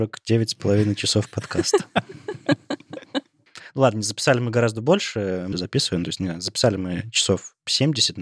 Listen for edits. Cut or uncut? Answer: cut